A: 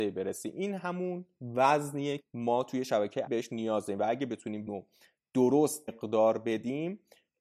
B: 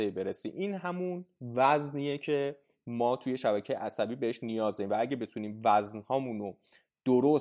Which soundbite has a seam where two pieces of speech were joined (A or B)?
A